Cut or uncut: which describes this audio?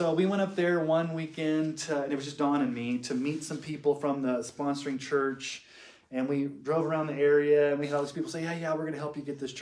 uncut